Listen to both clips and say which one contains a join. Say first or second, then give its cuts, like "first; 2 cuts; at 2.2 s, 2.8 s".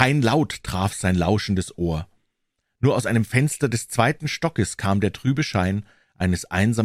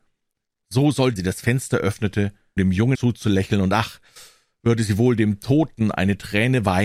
second; 3 cuts; at 1.2 s, 2.6 s, 2.9 s